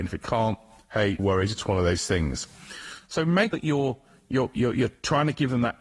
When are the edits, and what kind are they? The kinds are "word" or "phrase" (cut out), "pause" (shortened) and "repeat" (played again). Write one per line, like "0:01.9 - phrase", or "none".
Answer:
0:01.2 - word
0:03.5 - word